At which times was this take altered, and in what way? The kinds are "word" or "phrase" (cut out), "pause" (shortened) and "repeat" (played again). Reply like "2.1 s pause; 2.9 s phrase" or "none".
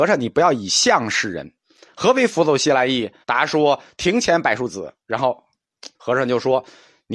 3.2 s pause; 5.9 s pause